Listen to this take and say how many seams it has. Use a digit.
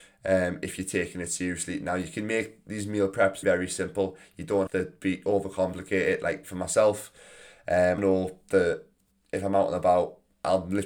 3